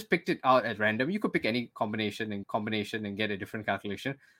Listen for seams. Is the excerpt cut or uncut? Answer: cut